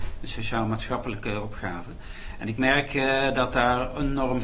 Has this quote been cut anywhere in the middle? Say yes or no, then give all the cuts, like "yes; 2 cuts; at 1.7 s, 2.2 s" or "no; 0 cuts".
no; 0 cuts